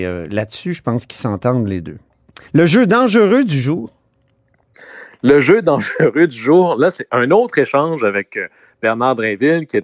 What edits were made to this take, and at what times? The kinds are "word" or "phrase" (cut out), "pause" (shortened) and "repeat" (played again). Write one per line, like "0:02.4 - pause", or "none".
0:02.5 - pause